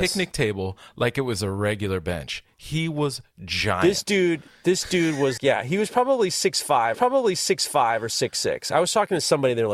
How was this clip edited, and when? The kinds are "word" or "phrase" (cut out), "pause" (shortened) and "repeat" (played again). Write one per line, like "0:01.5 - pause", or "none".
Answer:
0:05.4 - word
0:06.9 - repeat